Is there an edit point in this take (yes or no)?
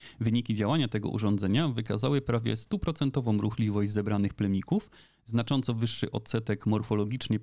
no